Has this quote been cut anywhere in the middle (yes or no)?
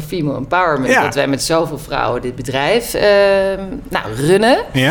no